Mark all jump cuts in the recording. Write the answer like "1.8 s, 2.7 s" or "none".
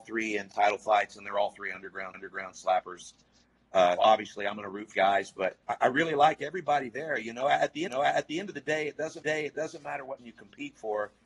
2.1 s, 4.0 s, 4.9 s, 5.6 s, 7.9 s, 9.2 s, 10.2 s